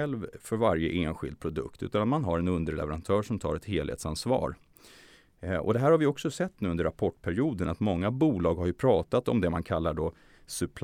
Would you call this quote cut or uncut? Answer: uncut